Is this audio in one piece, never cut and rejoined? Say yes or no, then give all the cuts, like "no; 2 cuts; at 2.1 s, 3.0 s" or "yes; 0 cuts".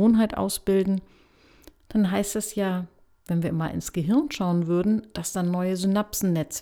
yes; 0 cuts